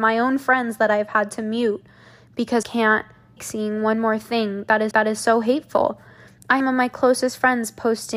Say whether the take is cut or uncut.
cut